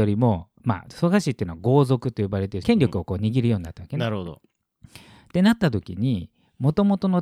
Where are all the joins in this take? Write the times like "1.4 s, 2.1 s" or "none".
2.6 s